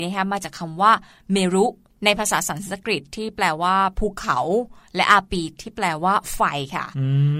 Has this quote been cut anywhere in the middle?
no; 0 cuts

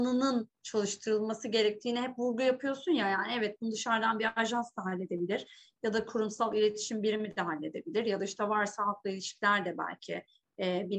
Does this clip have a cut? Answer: no; 0 cuts

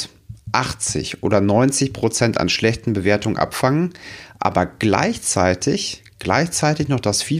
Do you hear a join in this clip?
no; 0 cuts

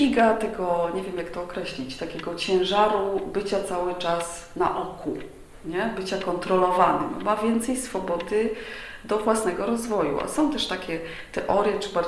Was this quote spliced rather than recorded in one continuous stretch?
no; 0 cuts

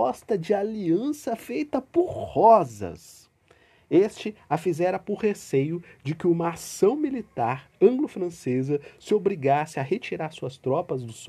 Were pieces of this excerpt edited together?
no; 0 cuts

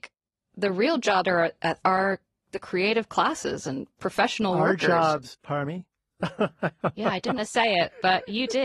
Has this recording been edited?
yes; 3 cuts; at 1.2 s, 1.8 s, 7.4 s

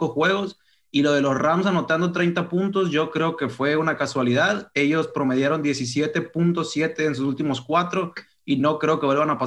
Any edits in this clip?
no; 0 cuts

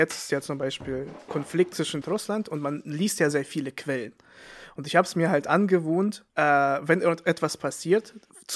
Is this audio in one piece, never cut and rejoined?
no; 3 cuts; at 2.0 s, 3.3 s, 6.3 s

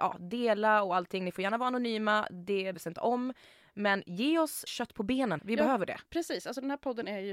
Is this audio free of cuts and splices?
no; 3 cuts; at 2.7 s, 4.7 s, 5.4 s

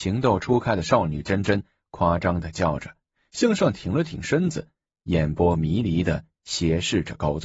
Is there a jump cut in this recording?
no; 0 cuts

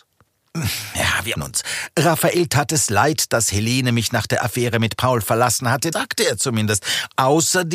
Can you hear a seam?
yes; 2 cuts; at 1.4 s, 5.9 s

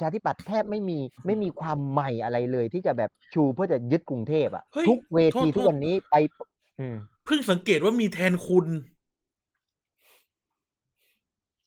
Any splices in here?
yes; 3 cuts; at 1.1 s, 4.7 s, 7.1 s

